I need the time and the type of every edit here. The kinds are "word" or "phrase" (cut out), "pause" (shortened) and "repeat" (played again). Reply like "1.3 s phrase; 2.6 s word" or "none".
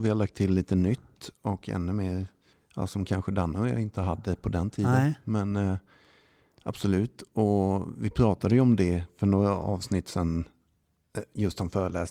none

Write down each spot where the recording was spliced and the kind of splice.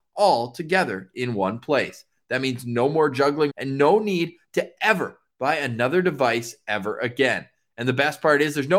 3.5 s word

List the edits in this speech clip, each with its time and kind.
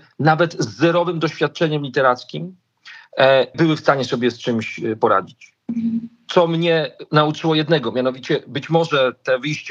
3.5 s word

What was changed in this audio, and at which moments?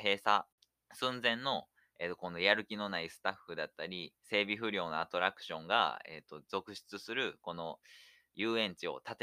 4.2 s pause

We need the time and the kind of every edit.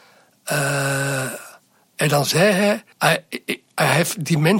2.9 s pause

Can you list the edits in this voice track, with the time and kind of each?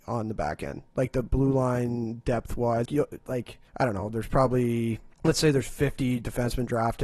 2.9 s word; 3.7 s pause; 5.1 s pause

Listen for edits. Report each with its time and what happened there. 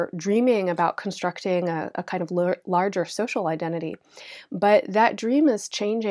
none

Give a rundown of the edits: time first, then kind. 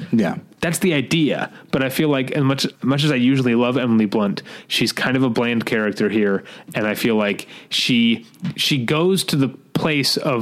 2.8 s pause

